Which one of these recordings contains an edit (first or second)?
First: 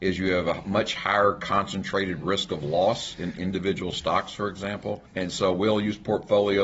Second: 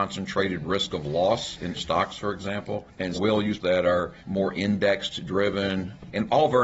second